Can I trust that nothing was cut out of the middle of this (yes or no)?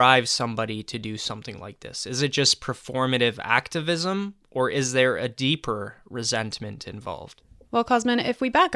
yes